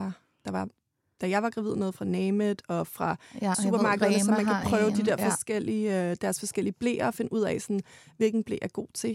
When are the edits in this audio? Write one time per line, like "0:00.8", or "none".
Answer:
0:03.5